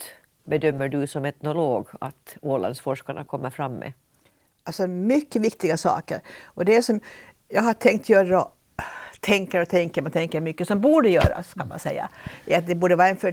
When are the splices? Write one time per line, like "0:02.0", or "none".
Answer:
none